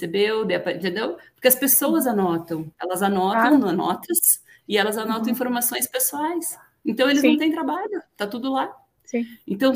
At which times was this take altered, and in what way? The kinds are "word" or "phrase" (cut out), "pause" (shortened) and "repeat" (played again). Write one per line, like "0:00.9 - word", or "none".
none